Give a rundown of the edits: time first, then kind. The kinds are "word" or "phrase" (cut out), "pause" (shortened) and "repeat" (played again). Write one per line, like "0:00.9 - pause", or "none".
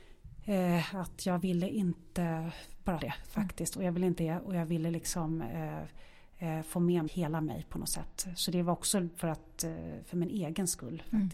0:03.0 - word
0:04.2 - word
0:07.1 - word